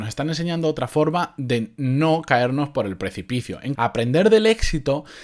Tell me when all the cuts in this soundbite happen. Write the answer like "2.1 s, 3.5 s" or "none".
3.7 s